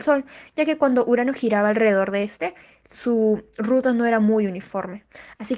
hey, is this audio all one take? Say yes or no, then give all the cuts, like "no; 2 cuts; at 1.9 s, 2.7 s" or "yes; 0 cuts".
yes; 0 cuts